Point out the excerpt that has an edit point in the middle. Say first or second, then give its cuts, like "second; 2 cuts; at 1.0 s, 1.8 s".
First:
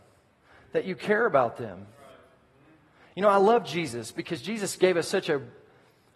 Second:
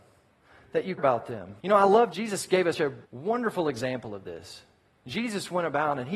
second; 5 cuts; at 1.0 s, 1.6 s, 2.1 s, 2.7 s, 3.0 s